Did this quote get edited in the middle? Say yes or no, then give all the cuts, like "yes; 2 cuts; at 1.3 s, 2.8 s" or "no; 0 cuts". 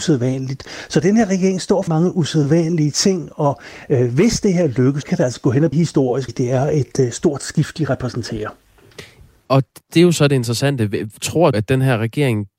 yes; 5 cuts; at 1.9 s, 5.0 s, 5.7 s, 6.3 s, 11.5 s